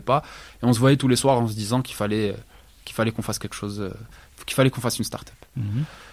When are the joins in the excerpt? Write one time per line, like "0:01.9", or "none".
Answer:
none